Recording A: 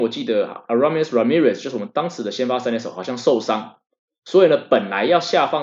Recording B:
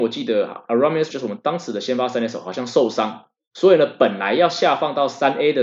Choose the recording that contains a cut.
B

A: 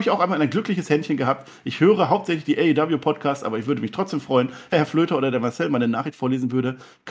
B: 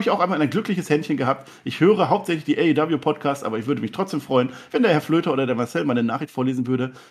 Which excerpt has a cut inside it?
A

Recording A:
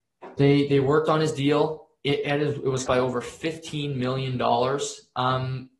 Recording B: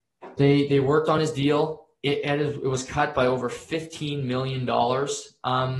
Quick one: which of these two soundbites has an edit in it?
A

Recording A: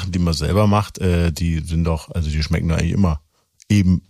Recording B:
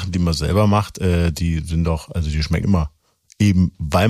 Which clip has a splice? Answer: B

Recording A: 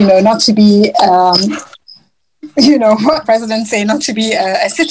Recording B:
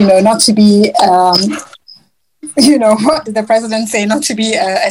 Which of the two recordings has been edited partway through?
A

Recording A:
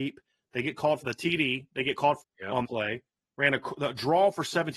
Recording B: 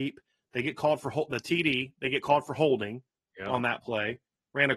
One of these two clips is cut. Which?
A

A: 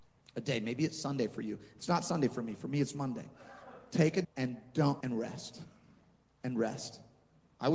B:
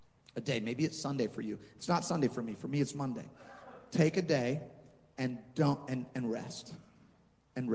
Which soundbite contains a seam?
A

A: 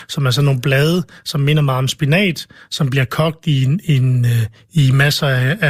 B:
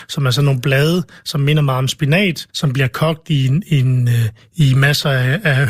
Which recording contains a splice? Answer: B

